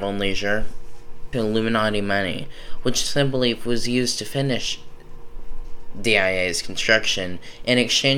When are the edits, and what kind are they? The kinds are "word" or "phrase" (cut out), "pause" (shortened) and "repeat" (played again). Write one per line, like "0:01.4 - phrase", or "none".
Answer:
0:01.3 - phrase